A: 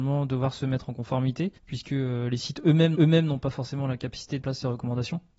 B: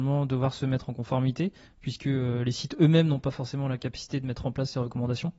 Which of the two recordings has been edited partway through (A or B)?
A